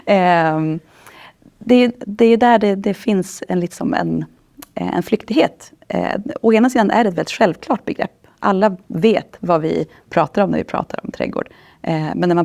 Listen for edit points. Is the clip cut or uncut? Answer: uncut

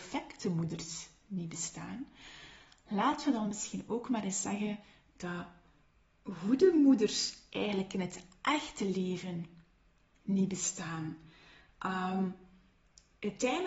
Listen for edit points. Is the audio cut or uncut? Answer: uncut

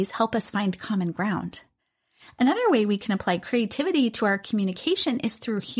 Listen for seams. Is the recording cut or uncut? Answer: uncut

